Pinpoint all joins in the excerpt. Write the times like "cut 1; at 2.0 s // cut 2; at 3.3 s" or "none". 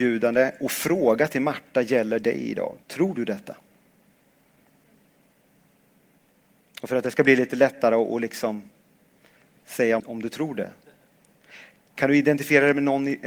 cut 1; at 2.8 s // cut 2; at 10.0 s